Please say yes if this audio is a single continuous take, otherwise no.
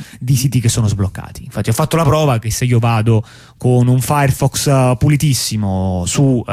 yes